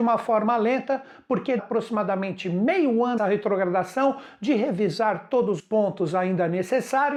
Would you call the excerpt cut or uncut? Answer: cut